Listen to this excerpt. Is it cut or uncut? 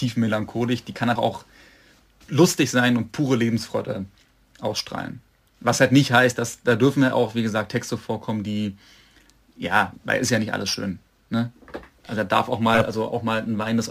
cut